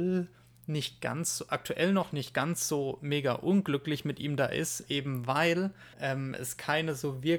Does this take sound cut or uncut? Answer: cut